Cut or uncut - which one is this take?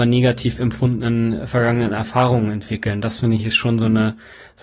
uncut